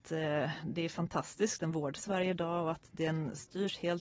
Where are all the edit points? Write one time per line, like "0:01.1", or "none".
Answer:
0:02.0